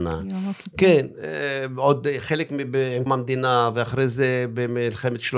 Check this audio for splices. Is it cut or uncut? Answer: cut